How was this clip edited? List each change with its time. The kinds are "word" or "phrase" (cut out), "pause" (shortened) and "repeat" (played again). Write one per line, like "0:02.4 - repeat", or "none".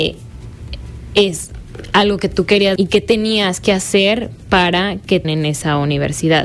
0:02.8 - word
0:05.2 - word